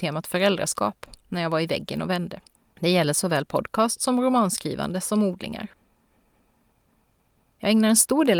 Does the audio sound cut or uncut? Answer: cut